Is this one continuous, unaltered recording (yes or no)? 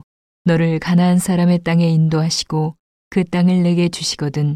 yes